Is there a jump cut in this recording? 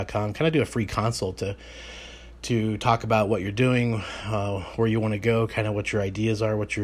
no; 0 cuts

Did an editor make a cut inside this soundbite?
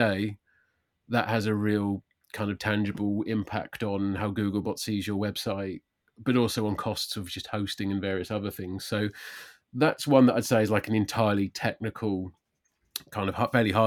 no; 0 cuts

